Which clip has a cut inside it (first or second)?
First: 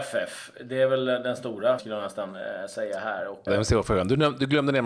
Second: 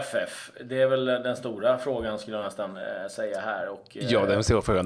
first